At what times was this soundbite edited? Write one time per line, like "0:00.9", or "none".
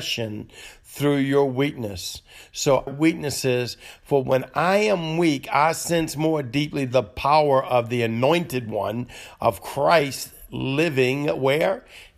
0:02.9